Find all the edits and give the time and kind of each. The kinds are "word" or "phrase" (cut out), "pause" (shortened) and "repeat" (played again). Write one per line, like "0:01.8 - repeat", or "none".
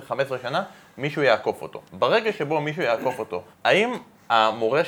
0:01.9 - pause
0:03.5 - pause

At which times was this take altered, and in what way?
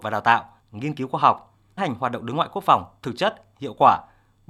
0:01.8 - word

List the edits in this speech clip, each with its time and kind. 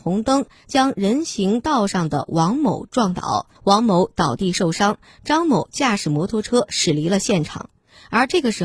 0:03.6 - pause

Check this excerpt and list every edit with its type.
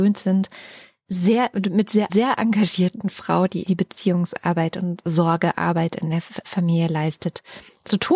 0:02.1 - word
0:03.7 - word
0:06.4 - word

